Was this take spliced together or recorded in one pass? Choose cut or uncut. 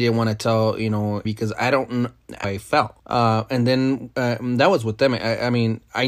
cut